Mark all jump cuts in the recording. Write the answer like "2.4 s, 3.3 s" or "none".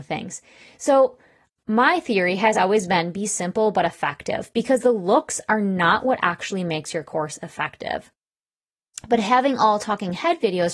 none